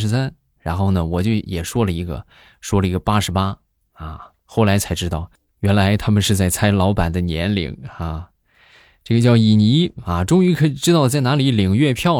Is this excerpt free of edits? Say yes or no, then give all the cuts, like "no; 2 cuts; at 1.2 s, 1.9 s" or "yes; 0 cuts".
yes; 0 cuts